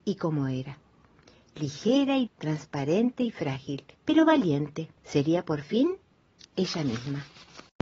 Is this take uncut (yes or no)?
no